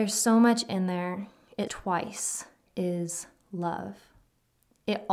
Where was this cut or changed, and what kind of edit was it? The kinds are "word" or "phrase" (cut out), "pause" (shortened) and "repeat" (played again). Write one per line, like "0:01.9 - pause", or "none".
0:01.7 - word
0:02.7 - word